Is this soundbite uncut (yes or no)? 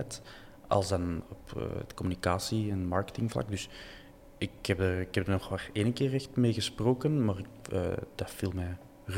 yes